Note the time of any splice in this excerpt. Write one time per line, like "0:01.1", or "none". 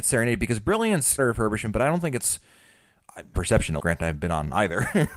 0:01.2
0:03.3
0:03.8